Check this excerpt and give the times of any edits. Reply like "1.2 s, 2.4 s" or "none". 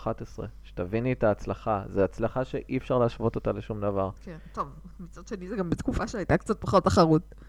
4.2 s